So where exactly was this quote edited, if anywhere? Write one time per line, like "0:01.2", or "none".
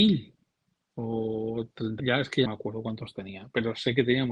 0:02.0
0:02.5